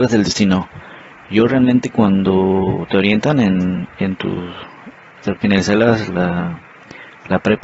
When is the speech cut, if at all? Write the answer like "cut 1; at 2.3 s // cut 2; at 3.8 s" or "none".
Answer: none